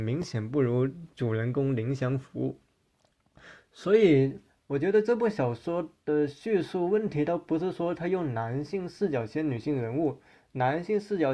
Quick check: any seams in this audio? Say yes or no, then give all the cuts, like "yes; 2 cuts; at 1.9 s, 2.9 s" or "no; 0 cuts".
no; 0 cuts